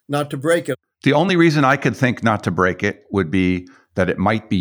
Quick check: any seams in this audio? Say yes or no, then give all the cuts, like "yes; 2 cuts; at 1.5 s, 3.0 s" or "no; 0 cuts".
no; 0 cuts